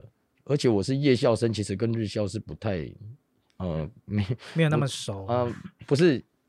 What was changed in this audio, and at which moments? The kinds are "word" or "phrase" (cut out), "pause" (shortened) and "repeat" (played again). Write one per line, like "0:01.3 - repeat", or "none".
none